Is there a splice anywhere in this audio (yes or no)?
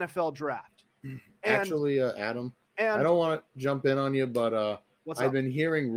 no